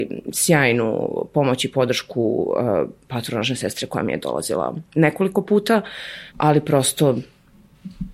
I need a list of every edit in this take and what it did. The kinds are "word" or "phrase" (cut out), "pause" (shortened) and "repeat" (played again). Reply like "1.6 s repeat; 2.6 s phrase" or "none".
4.9 s pause; 6.3 s pause